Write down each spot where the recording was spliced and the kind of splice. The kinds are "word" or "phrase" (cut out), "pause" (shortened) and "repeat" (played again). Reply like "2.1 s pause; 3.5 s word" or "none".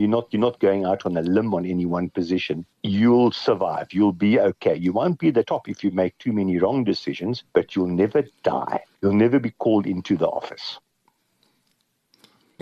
2.7 s pause; 7.5 s pause; 8.9 s pause